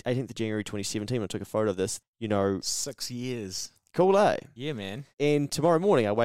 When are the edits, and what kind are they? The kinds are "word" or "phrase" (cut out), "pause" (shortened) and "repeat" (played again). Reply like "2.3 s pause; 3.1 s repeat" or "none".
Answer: 2.0 s word; 5.1 s pause